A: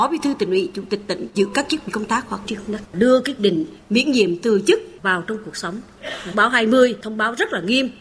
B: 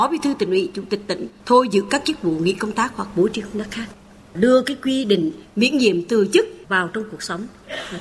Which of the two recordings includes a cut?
A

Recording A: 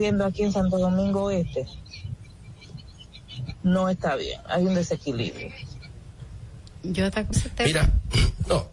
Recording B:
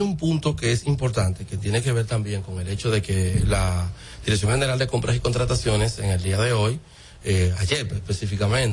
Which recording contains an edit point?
A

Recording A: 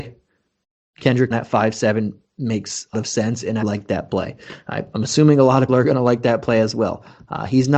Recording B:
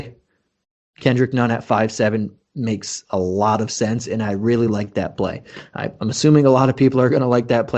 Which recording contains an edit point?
A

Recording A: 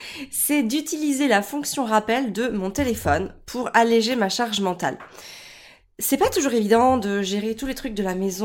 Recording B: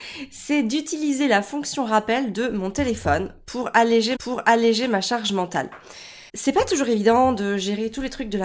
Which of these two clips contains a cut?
B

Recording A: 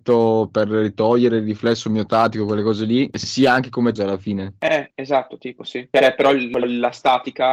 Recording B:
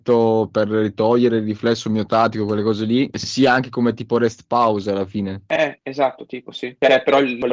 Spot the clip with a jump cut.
A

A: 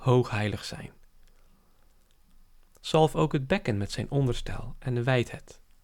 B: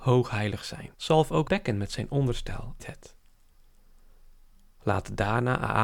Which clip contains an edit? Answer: B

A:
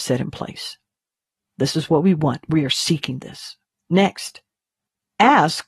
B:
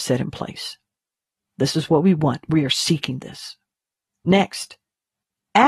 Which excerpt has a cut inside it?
A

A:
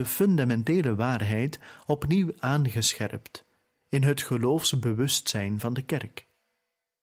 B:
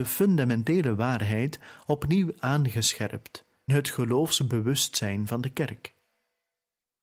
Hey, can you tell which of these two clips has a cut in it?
B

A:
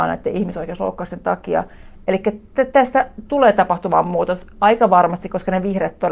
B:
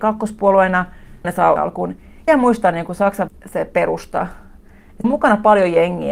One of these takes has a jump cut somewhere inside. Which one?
B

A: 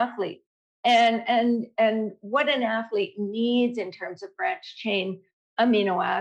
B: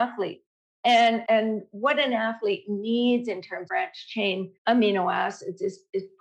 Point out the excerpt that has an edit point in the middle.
B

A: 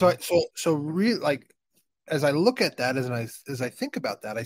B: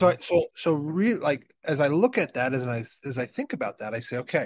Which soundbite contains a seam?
B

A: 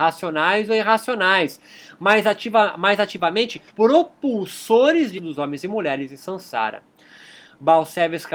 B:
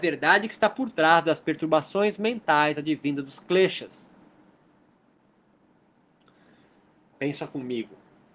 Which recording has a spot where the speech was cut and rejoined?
A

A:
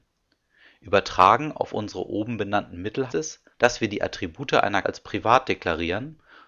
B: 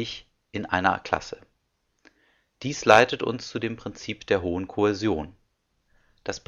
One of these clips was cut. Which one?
A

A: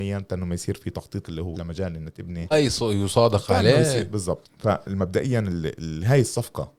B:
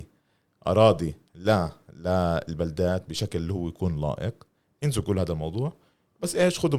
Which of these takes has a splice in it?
A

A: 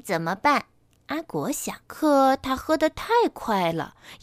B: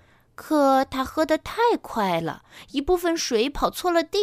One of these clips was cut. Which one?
A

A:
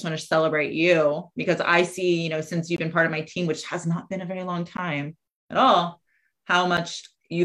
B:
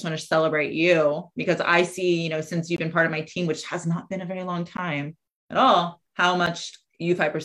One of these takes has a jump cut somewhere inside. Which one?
B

